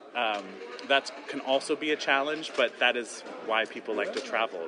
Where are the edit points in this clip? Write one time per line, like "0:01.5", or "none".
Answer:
none